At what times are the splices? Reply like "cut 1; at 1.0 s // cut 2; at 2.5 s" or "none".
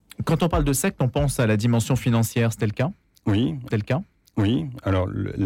cut 1; at 3.7 s